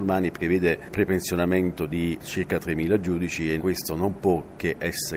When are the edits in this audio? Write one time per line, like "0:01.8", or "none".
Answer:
0:03.6